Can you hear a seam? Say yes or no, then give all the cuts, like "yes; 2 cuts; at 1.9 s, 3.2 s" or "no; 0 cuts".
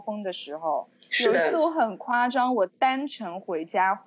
no; 0 cuts